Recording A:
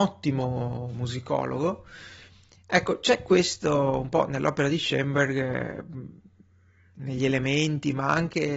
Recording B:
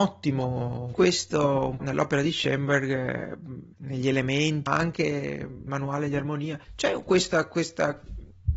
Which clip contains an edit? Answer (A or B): B